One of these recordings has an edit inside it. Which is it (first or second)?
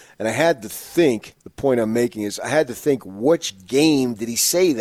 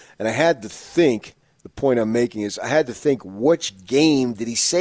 first